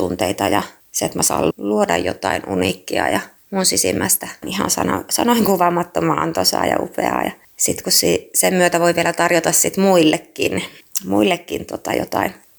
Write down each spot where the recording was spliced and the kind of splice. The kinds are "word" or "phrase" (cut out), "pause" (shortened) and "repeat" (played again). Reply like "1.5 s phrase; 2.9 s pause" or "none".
1.5 s word; 4.4 s phrase